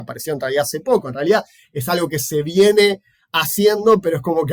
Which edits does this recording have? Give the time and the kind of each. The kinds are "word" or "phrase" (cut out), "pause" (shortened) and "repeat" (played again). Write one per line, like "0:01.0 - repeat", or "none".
none